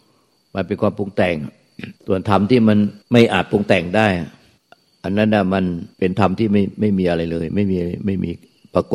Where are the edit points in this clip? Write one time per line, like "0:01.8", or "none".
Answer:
0:02.0
0:03.0
0:04.6
0:05.9